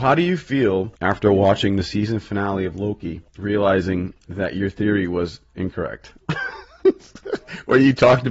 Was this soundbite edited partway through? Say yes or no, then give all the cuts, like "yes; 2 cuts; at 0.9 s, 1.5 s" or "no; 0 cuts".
yes; 2 cuts; at 1.0 s, 3.3 s